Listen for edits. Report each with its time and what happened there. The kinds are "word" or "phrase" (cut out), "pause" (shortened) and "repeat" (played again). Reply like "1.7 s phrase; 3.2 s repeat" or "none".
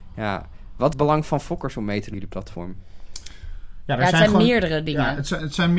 0.9 s word; 2.1 s word